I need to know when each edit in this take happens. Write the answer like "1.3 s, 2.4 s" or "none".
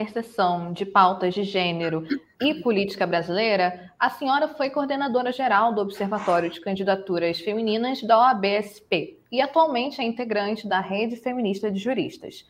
9.2 s